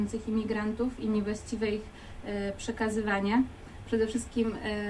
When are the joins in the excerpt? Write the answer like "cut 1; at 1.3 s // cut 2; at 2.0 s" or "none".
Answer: none